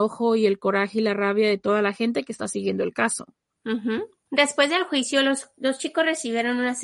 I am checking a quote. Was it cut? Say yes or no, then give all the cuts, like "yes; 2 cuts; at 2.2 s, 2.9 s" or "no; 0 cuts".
no; 0 cuts